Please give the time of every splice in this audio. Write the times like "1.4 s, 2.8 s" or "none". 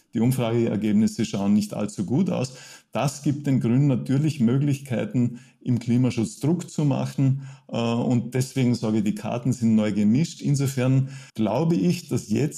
11.3 s